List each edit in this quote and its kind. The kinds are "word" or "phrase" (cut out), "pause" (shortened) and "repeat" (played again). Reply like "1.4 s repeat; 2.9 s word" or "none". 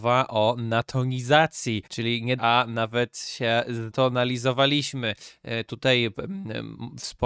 1.9 s pause; 2.4 s phrase; 3.9 s word